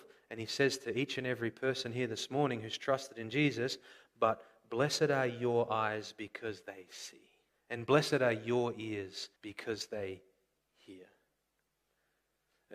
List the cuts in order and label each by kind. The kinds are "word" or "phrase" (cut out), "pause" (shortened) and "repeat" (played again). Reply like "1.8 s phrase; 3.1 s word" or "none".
7.5 s pause; 9.4 s pause

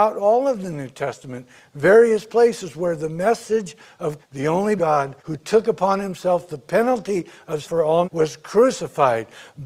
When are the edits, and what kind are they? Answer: 4.2 s word; 4.8 s phrase; 5.2 s pause; 7.6 s word; 8.0 s word

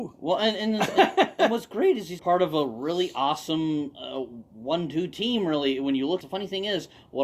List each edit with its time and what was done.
2.2 s word; 6.2 s phrase

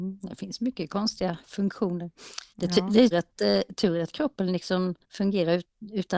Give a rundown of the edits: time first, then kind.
2.5 s pause; 3.1 s word; 5.0 s pause

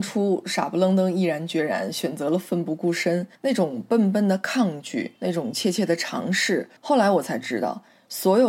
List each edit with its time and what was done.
3.3 s pause; 5.2 s pause; 6.8 s pause

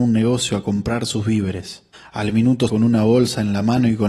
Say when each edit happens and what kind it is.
1.9 s pause; 2.7 s word

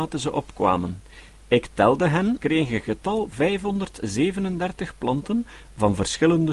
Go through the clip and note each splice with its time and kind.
2.4 s word; 3.3 s word

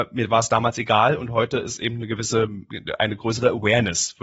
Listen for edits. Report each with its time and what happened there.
none

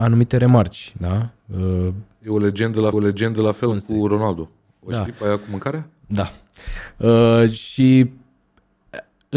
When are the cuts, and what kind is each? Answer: 2.9 s repeat

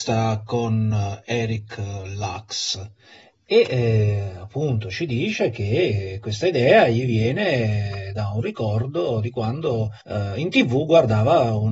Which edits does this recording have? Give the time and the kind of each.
10.0 s pause

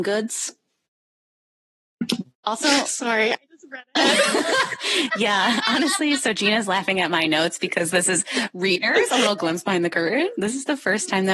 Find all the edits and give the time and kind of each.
none

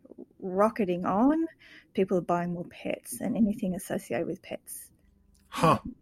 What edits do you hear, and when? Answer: none

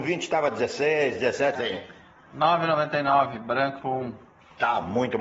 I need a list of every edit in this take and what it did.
1.5 s word; 3.8 s word

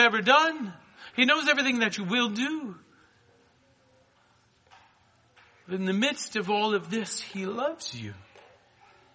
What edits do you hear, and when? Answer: none

